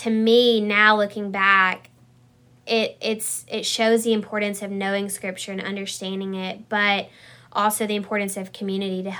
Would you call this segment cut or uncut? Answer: uncut